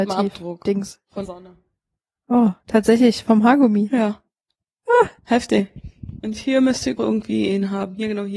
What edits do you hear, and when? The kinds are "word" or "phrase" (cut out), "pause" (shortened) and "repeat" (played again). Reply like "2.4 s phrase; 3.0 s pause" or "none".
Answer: 1.2 s word; 2.6 s pause; 5.2 s pause; 7.0 s word